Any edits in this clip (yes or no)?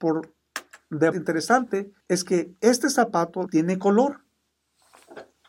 yes